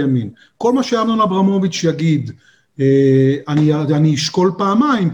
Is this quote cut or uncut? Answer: uncut